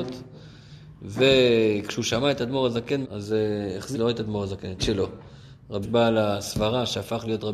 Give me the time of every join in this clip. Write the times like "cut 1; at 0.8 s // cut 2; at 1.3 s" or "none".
cut 1; at 3.0 s // cut 2; at 3.9 s // cut 3; at 4.8 s // cut 4; at 5.8 s